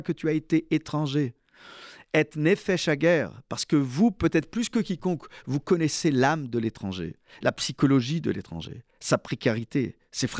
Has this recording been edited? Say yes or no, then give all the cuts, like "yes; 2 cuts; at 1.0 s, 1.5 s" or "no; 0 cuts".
no; 0 cuts